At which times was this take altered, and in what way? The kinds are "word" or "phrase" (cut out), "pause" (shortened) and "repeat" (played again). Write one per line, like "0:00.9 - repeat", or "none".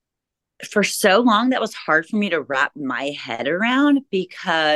none